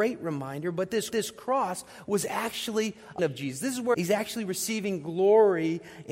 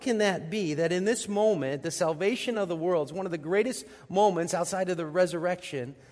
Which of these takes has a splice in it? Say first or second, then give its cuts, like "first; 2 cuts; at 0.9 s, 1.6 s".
first; 3 cuts; at 1.1 s, 3.2 s, 3.9 s